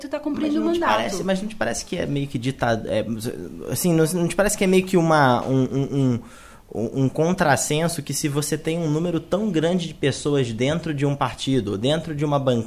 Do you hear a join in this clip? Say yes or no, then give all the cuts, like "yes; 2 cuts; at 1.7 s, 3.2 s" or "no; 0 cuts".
no; 0 cuts